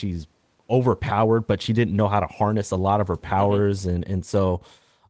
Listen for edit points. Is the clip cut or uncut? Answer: uncut